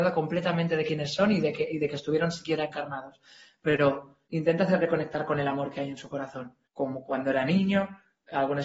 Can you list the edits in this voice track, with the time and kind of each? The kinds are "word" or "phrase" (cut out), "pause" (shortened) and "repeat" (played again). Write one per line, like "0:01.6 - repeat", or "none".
0:04.2 - pause
0:06.6 - pause